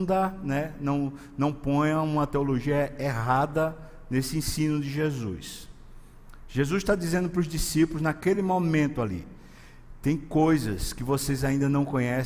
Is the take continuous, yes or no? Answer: yes